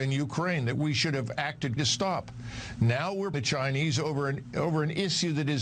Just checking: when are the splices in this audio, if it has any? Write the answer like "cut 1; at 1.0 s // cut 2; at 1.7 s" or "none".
cut 1; at 1.8 s // cut 2; at 3.3 s